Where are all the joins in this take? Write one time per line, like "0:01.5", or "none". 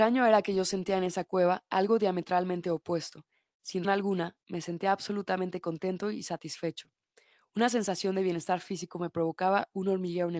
0:03.8